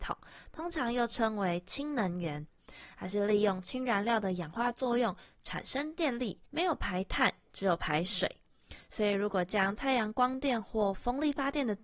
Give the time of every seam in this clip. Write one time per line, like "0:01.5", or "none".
0:06.5